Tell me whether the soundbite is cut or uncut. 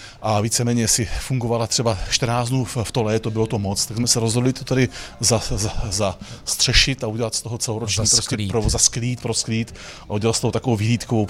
uncut